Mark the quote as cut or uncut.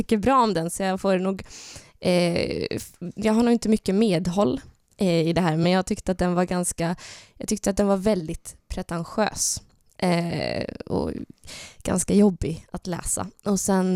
uncut